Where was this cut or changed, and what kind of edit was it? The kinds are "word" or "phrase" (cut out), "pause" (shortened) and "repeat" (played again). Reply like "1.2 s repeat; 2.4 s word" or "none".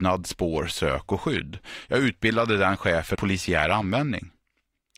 3.2 s word